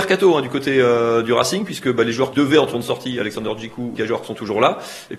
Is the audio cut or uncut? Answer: cut